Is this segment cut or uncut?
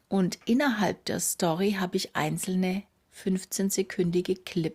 uncut